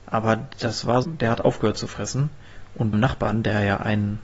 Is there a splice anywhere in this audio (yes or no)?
yes